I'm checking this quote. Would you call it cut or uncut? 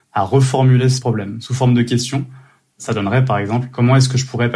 uncut